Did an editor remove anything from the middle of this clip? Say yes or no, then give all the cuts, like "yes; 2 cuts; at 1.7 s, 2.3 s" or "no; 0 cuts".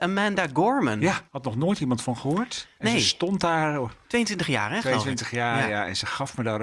yes; 2 cuts; at 1.3 s, 4.0 s